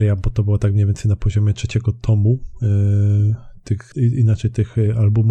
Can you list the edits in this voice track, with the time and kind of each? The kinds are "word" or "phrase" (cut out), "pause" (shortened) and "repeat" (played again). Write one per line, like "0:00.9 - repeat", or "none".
0:03.9 - word